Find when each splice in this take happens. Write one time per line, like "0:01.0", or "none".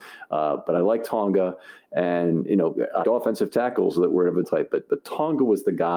0:03.0
0:04.4

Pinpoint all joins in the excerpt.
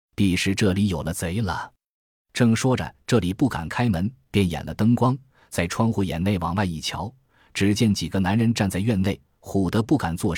none

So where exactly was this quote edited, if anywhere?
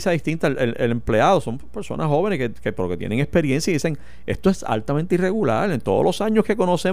none

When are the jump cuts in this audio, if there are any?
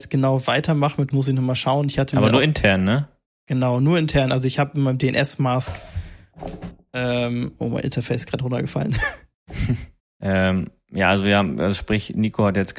0:01.1

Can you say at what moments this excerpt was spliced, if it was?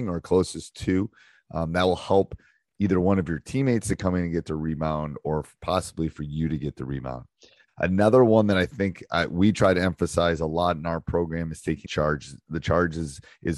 0:11.8

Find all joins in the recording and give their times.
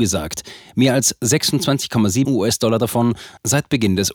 0:02.2

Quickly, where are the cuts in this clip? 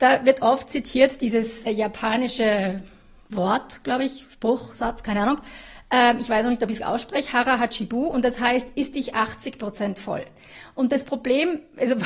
0:01.7
0:06.8

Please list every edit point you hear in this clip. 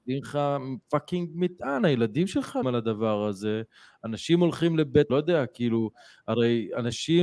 0:02.6
0:05.1

